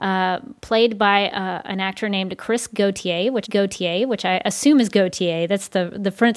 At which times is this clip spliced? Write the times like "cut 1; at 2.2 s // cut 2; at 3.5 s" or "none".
cut 1; at 3.4 s